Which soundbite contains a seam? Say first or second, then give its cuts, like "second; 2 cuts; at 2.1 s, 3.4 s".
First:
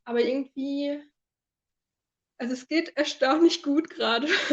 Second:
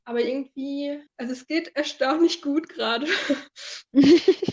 second; 1 cut; at 1.1 s